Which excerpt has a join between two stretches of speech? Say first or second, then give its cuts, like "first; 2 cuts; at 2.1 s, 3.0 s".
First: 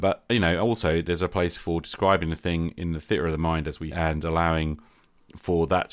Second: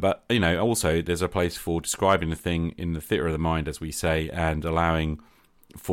first; 1 cut; at 3.9 s